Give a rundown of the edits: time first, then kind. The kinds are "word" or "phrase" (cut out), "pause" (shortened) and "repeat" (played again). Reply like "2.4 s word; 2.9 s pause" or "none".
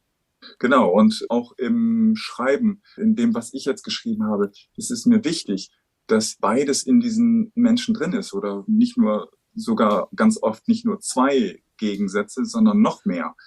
1.3 s word; 3.0 s word; 6.4 s word